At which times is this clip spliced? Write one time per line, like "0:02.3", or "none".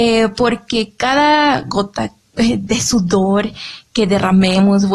none